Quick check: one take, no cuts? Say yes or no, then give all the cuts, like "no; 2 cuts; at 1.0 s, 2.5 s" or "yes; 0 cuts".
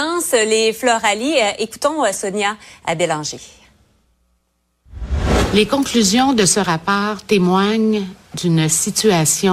yes; 0 cuts